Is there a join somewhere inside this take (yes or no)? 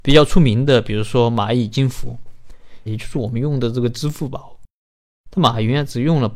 yes